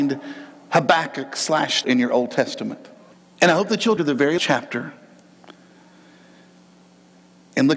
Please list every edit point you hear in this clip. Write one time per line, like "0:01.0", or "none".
0:01.8
0:03.1
0:04.0
0:04.4